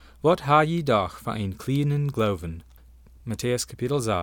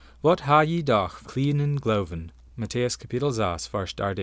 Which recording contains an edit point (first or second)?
second